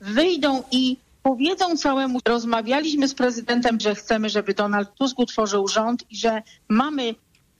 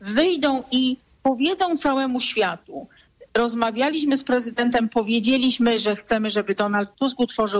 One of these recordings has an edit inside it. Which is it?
first; 2 cuts; at 2.2 s, 3.8 s

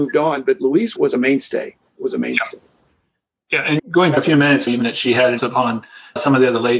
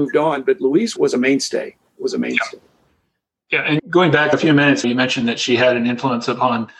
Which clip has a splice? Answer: first; 3 cuts; at 4.1 s, 4.8 s, 5.4 s

